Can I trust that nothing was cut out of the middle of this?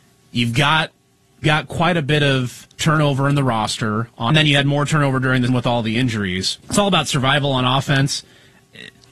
no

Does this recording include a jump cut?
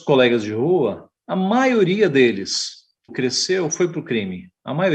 yes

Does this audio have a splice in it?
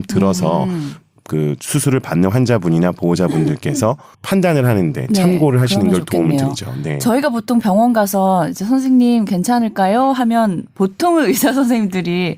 yes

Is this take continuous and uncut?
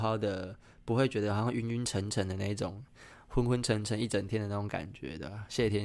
yes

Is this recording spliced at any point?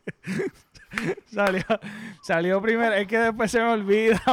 no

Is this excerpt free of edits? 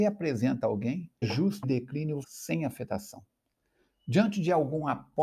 no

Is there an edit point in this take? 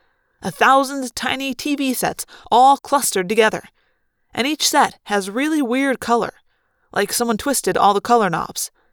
no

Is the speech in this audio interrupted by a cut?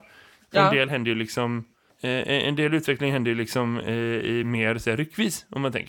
no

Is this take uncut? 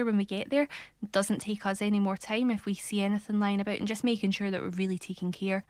yes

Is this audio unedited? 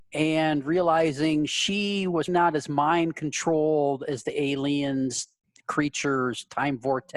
no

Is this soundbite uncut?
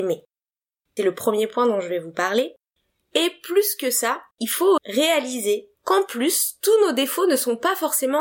no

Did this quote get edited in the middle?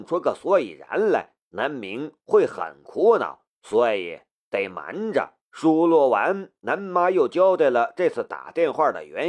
yes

